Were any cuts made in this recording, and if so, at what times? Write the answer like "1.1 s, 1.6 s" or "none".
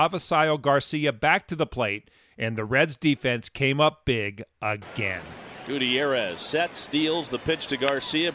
none